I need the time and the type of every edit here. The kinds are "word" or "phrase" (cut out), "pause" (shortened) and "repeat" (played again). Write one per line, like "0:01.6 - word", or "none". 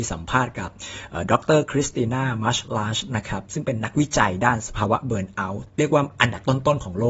0:05.7 - pause